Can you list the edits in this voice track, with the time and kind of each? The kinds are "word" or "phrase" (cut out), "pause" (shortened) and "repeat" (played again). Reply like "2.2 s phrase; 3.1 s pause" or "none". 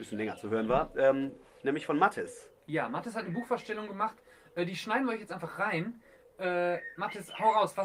none